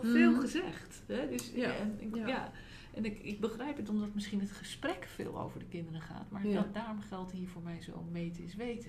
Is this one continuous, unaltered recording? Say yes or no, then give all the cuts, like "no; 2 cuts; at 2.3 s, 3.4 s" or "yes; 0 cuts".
yes; 0 cuts